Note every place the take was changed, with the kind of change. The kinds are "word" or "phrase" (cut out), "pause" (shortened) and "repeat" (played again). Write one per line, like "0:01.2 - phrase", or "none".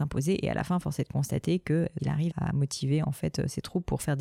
0:02.0 - word
0:02.3 - word